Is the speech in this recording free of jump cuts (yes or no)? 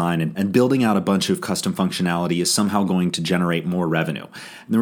yes